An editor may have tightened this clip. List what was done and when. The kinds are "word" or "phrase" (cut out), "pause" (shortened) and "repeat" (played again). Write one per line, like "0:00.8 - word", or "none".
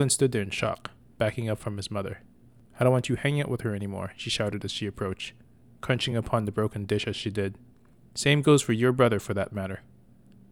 none